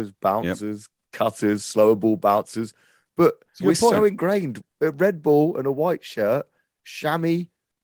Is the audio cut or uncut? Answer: cut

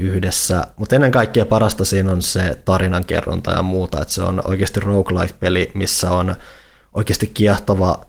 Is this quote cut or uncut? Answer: uncut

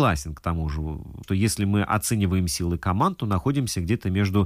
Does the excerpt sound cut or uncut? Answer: cut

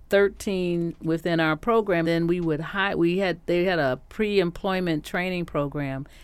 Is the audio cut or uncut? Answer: cut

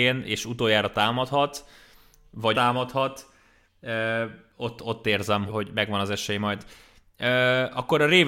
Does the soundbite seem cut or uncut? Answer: cut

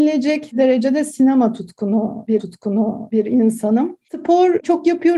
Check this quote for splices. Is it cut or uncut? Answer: cut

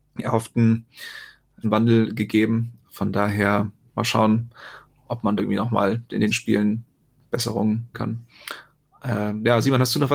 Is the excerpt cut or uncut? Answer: cut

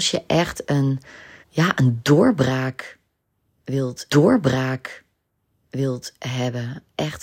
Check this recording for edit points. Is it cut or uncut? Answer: cut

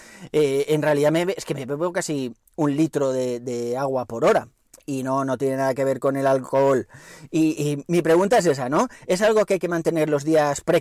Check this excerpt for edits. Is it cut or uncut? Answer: cut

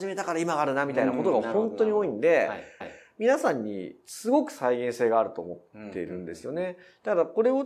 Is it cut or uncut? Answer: cut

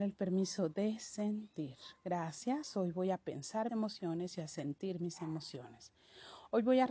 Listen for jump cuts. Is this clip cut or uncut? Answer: cut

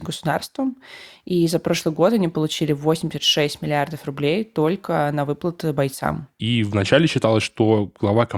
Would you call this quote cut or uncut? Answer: uncut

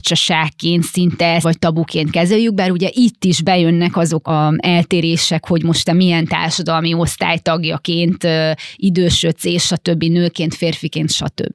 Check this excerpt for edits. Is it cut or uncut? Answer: cut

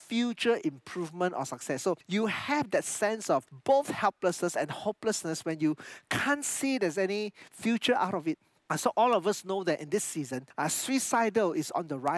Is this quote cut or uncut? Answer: uncut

